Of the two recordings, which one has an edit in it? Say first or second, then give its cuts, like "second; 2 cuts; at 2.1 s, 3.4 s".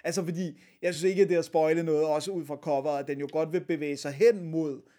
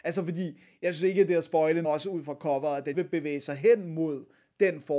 second; 2 cuts; at 1.8 s, 2.9 s